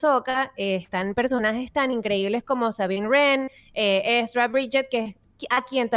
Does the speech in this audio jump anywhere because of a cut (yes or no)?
no